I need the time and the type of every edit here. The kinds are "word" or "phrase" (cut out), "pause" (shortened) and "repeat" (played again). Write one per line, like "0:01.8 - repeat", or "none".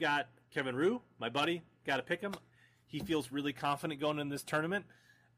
none